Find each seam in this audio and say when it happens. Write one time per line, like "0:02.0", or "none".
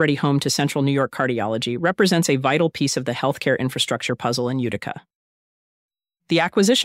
none